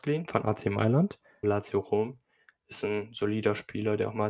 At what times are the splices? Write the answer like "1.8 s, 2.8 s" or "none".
1.4 s